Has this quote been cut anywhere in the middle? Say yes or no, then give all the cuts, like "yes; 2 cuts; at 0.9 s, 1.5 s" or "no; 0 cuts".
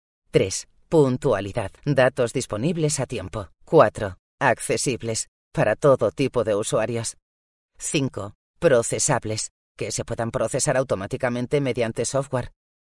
yes; 2 cuts; at 1.8 s, 3.6 s